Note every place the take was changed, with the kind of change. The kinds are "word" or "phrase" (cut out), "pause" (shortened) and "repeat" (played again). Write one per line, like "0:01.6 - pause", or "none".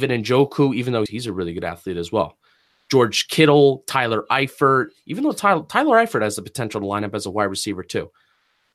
0:01.1 - word